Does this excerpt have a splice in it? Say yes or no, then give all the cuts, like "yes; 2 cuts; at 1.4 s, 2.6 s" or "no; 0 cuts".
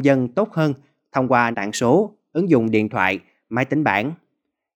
yes; 1 cut; at 1.5 s